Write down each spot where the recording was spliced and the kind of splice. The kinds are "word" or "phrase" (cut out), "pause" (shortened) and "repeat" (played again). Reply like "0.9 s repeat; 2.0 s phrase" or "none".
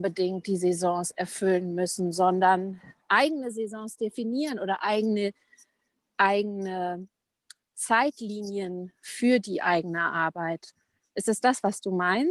none